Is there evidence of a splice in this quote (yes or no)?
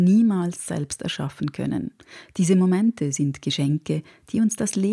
no